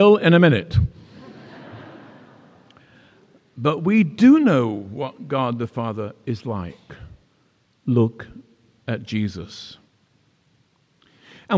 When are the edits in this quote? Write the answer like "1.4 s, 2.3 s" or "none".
none